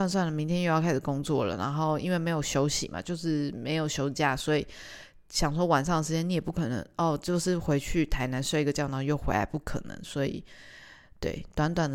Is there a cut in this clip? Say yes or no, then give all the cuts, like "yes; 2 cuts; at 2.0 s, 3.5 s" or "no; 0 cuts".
no; 0 cuts